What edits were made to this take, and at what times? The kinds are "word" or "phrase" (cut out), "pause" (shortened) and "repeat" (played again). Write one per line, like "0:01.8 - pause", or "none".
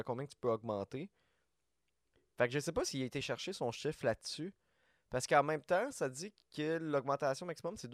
none